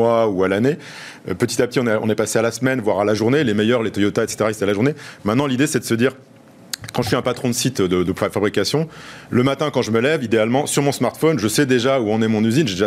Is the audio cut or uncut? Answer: uncut